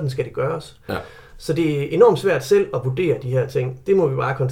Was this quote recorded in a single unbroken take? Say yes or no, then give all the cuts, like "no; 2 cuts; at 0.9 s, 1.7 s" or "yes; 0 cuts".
yes; 0 cuts